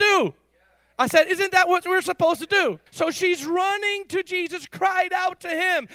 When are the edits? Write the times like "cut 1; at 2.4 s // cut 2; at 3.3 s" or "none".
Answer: cut 1; at 2.9 s